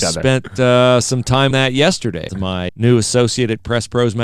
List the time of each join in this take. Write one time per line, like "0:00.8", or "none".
0:01.5
0:02.3
0:02.7